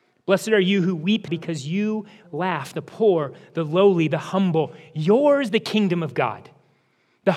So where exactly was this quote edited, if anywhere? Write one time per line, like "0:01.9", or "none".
0:01.3
0:02.2
0:05.5